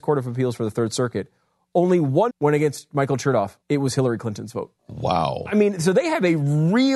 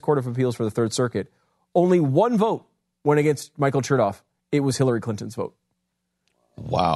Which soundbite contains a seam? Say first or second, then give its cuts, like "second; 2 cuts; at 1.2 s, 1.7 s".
first; 3 cuts; at 2.3 s, 3.6 s, 4.8 s